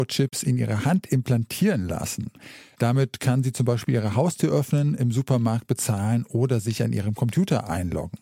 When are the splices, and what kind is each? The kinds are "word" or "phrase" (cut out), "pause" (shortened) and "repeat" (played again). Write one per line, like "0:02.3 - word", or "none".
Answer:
none